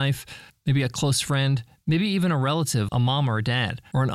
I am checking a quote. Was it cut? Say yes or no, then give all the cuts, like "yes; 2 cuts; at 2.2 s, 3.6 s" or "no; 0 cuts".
yes; 1 cut; at 2.9 s